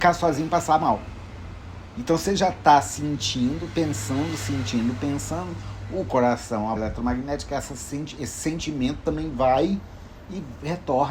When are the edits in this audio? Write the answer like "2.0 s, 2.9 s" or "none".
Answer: 6.8 s